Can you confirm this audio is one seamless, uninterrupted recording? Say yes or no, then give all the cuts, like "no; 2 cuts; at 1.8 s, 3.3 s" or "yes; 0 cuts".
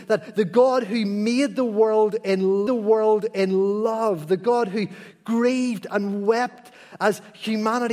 no; 1 cut; at 2.7 s